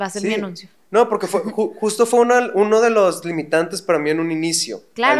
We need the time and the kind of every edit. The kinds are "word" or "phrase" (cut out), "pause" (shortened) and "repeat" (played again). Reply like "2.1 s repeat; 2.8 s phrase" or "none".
none